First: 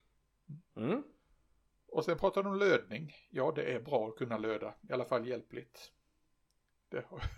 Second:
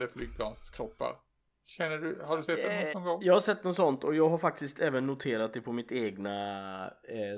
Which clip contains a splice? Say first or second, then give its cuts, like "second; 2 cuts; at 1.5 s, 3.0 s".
second; 2 cuts; at 1.4 s, 2.9 s